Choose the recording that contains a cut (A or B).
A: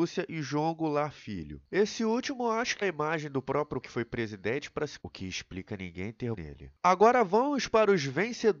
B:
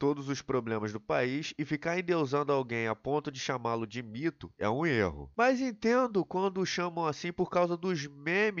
A